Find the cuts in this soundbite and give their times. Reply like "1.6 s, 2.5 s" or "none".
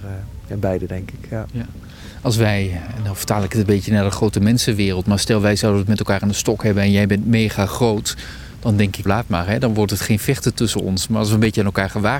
9.1 s